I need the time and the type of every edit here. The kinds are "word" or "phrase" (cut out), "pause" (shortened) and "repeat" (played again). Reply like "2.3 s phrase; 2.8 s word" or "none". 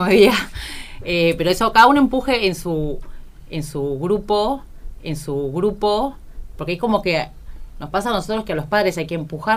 5.0 s repeat